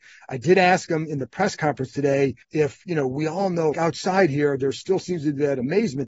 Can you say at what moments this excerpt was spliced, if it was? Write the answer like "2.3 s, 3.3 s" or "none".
2.4 s, 3.7 s